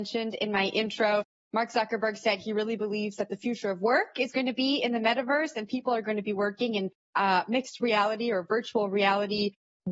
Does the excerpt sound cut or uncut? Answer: uncut